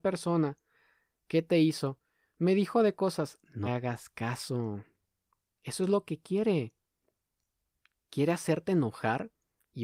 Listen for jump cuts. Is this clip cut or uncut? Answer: cut